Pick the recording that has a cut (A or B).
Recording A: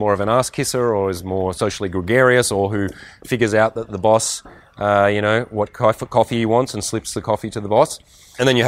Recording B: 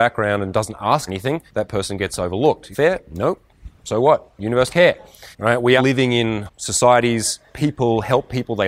B